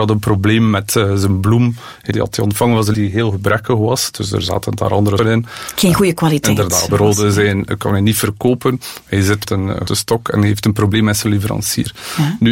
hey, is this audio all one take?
no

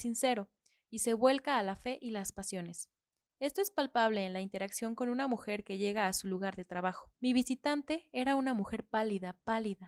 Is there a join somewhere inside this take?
yes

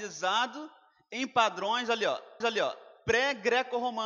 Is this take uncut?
no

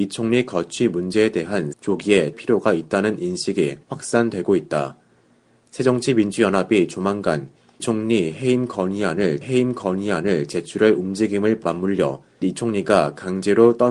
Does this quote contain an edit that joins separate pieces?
yes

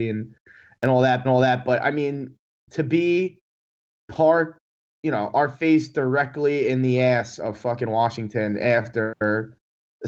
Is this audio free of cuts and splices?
no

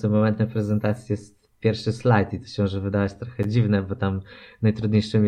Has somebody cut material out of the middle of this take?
no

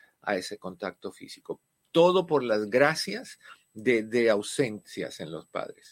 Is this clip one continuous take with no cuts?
yes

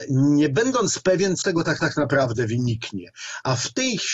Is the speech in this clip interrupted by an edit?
yes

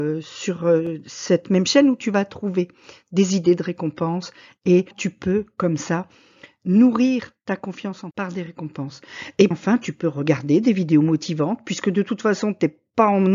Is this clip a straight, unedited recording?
no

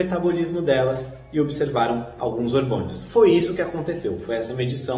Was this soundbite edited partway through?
no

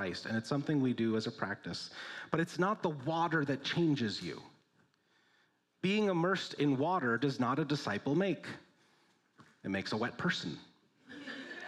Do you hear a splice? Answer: no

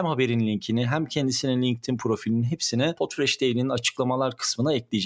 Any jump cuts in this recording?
no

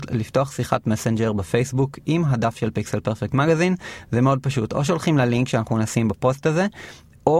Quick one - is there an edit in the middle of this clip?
no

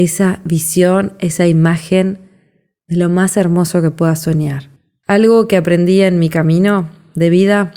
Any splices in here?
no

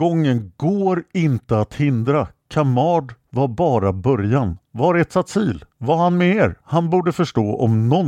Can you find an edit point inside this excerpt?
yes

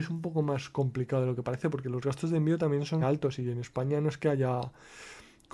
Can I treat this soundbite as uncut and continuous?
no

